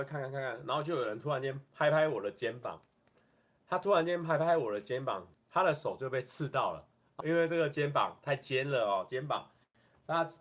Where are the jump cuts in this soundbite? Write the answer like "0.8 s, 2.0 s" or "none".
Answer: 5.3 s, 7.2 s

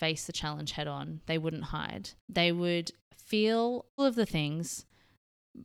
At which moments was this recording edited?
2.2 s, 4.0 s

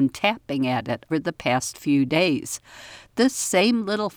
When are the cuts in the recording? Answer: 1.1 s

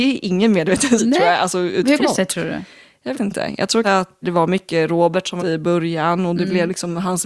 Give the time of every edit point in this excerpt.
1.0 s, 2.0 s, 3.1 s, 3.8 s, 4.2 s, 5.4 s

